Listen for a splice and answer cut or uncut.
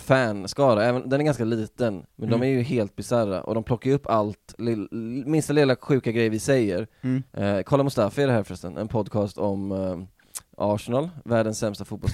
cut